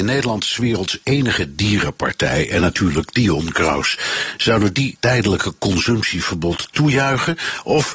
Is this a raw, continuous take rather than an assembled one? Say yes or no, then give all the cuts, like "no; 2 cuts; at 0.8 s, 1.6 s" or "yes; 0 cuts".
no; 1 cut; at 5.0 s